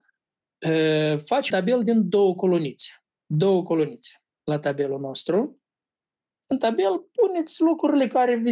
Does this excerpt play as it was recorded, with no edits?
no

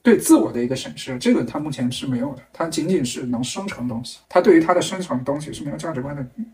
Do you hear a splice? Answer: yes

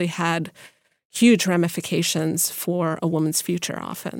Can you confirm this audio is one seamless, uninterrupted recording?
yes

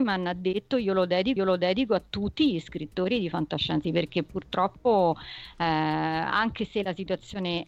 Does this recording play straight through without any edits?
no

